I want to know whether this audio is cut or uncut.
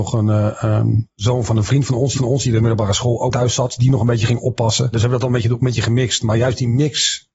cut